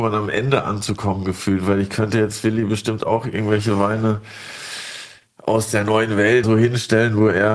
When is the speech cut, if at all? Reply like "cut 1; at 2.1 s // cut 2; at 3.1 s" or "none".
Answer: cut 1; at 6.4 s